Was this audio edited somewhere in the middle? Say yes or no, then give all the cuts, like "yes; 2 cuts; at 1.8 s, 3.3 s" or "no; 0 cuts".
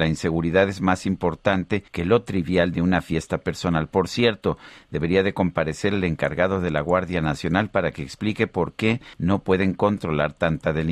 yes; 2 cuts; at 1.9 s, 9.1 s